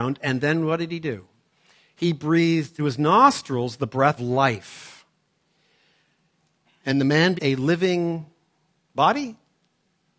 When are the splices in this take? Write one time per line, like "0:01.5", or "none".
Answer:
0:02.8
0:04.2
0:07.4
0:08.8